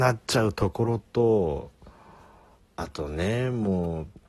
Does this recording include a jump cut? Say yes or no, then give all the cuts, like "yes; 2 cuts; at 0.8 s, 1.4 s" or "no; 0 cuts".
no; 0 cuts